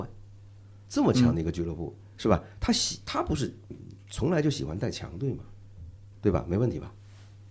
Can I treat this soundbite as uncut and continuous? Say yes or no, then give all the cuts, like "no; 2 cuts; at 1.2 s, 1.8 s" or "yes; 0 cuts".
yes; 0 cuts